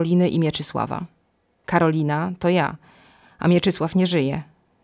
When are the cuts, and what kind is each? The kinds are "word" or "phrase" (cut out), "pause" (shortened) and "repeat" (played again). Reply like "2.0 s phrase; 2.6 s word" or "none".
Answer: none